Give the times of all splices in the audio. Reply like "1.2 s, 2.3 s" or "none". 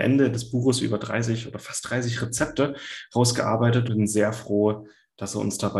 3.9 s